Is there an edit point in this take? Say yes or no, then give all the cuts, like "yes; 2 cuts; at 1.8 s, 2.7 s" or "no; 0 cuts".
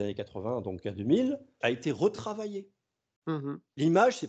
yes; 1 cut; at 1.6 s